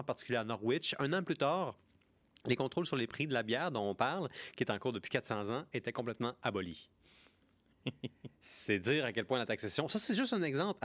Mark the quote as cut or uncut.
uncut